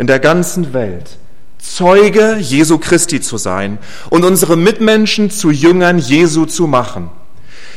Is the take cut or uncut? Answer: uncut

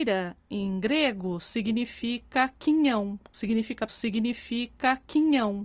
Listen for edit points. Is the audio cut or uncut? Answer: cut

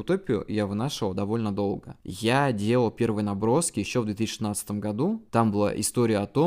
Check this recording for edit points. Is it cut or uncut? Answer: uncut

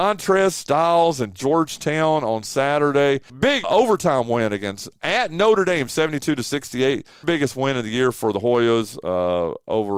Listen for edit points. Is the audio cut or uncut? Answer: cut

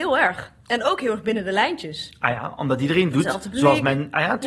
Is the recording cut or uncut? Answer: uncut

